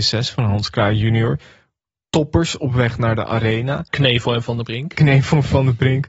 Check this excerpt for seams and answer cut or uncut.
uncut